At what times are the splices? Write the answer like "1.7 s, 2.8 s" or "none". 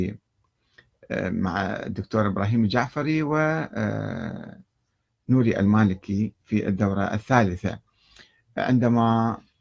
none